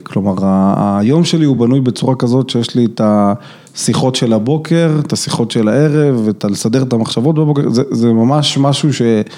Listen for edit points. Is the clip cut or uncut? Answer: uncut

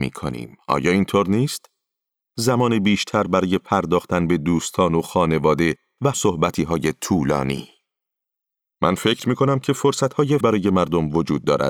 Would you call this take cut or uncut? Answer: cut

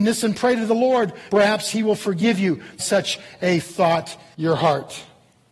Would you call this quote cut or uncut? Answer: cut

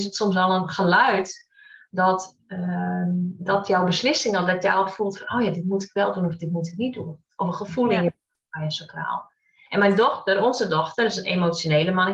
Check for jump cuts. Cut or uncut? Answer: uncut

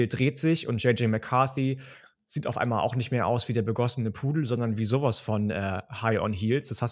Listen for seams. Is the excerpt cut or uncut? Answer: uncut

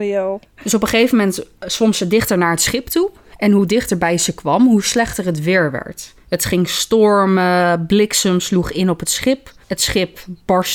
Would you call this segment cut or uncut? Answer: cut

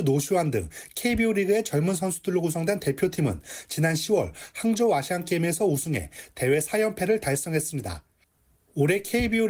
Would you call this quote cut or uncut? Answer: uncut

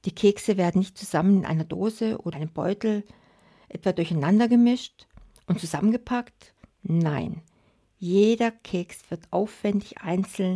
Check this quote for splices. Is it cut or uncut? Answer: cut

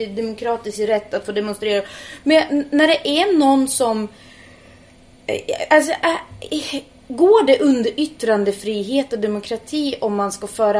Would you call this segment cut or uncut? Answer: uncut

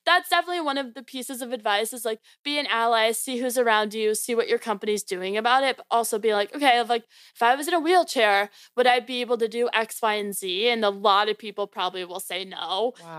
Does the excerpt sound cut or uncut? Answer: uncut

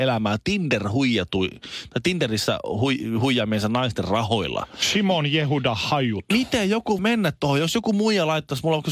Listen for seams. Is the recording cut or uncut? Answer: cut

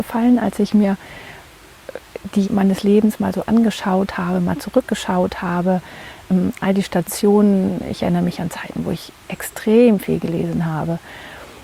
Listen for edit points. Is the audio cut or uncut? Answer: cut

